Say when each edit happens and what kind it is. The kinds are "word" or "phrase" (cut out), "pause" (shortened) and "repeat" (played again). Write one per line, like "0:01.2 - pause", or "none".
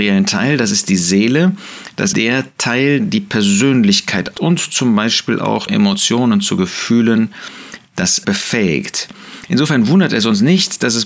0:02.1 - word
0:03.0 - word
0:04.3 - word
0:05.7 - word
0:08.2 - word